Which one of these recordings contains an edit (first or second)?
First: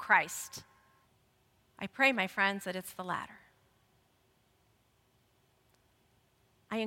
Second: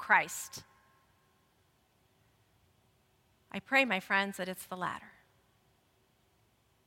first